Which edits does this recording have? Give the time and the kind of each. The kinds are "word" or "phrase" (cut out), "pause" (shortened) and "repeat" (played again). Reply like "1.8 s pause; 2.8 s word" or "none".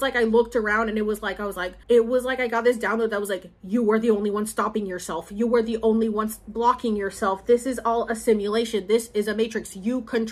1.8 s pause